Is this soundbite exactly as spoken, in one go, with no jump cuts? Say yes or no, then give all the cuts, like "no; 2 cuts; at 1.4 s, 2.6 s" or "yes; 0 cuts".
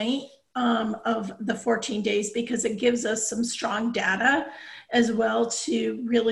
yes; 0 cuts